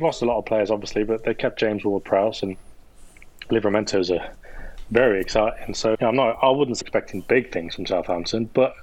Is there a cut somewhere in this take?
yes; 2 cuts; at 5.9 s, 6.8 s

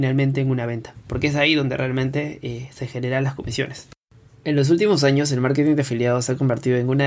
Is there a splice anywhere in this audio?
no; 0 cuts

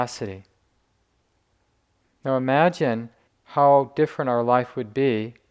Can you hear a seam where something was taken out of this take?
yes; 1 cut; at 3.3 s

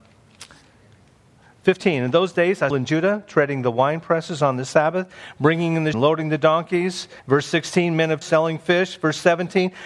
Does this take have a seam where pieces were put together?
yes; 4 cuts; at 2.7 s, 5.9 s, 7.2 s, 8.2 s

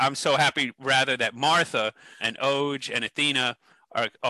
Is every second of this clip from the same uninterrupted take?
no; 1 cut; at 2.2 s

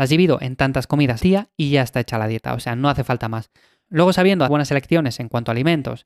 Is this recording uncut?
no; 2 cuts; at 1.2 s, 4.5 s

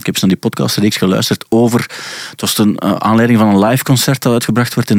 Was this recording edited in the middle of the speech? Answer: no; 0 cuts

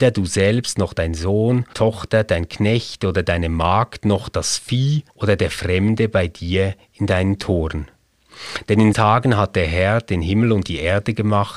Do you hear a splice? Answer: yes; 3 cuts; at 1.7 s, 5.1 s, 8.9 s

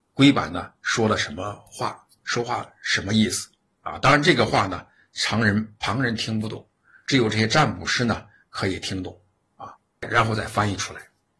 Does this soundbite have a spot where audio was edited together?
no; 0 cuts

